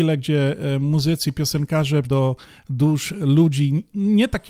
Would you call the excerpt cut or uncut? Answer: cut